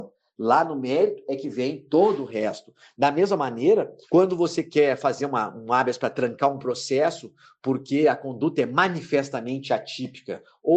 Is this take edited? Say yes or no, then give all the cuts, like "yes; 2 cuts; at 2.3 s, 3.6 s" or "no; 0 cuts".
yes; 1 cut; at 4.0 s